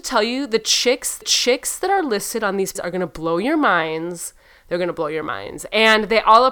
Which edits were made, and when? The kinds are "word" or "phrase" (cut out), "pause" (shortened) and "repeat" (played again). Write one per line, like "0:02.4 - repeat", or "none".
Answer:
0:01.2 - repeat
0:02.8 - word